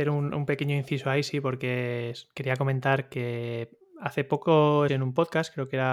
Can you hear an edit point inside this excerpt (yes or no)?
yes